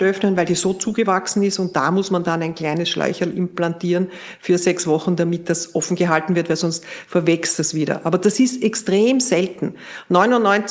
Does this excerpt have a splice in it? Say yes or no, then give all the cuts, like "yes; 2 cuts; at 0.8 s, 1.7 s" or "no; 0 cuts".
no; 0 cuts